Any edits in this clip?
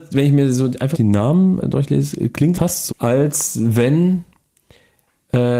yes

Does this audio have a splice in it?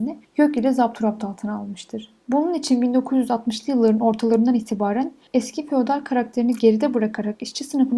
yes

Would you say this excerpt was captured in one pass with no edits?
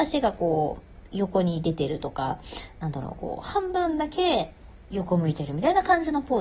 yes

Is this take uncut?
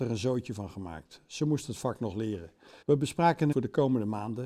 no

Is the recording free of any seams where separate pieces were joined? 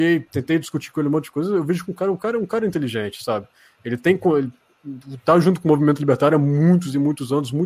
yes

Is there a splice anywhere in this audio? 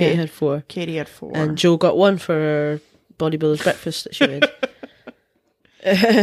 no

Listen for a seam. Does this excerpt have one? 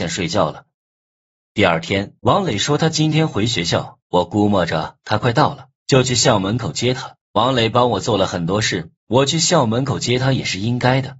yes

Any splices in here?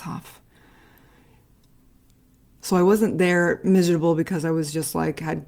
no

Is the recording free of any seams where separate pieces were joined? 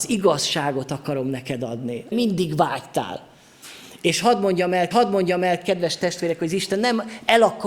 no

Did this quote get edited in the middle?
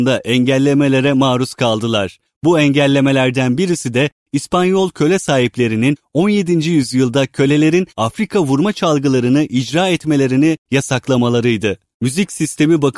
yes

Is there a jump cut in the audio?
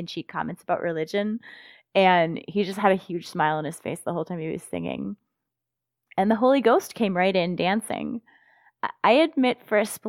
no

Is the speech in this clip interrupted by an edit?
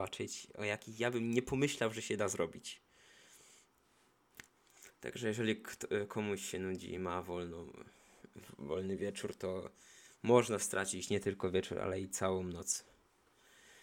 no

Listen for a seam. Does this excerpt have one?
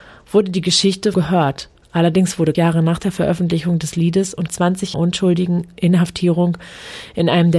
yes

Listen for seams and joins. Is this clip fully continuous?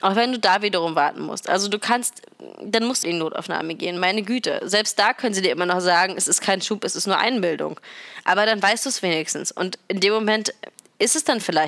no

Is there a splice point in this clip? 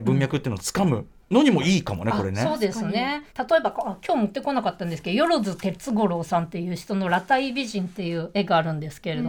yes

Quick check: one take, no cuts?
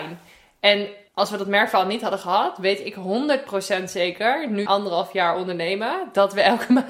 no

